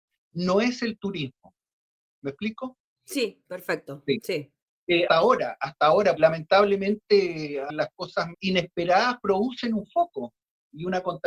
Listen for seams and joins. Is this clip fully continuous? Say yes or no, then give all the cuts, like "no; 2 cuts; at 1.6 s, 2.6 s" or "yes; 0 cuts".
no; 4 cuts; at 5.1 s, 6.2 s, 7.7 s, 8.3 s